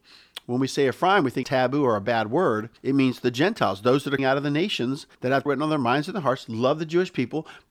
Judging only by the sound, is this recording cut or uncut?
cut